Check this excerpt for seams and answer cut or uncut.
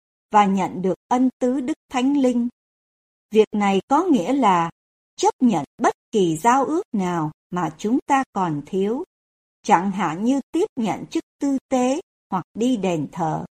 uncut